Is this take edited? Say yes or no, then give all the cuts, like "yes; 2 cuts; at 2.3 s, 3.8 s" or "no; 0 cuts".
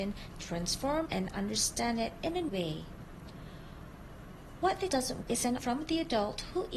yes; 5 cuts; at 1.0 s, 2.5 s, 4.9 s, 5.2 s, 5.6 s